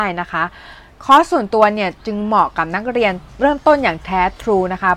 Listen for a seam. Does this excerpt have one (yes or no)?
yes